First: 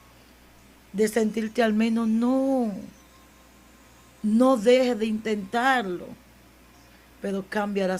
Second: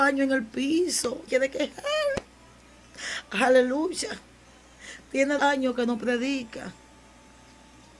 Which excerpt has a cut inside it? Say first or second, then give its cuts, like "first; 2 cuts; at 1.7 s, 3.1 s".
second; 2 cuts; at 1.3 s, 5.4 s